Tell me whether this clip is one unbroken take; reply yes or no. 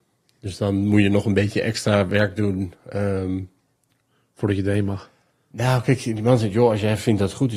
yes